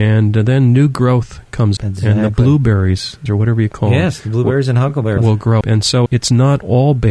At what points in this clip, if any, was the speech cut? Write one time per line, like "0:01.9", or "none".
0:01.8
0:03.3
0:05.2
0:05.6
0:06.1